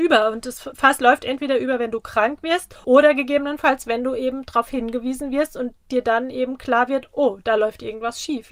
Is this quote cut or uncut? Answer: uncut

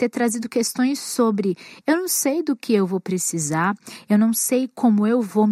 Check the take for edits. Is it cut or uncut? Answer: uncut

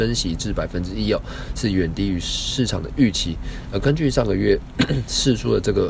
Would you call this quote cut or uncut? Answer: uncut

